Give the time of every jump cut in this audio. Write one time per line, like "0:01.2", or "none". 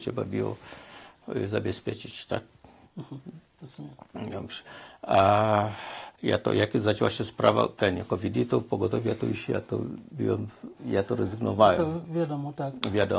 0:06.1
0:10.8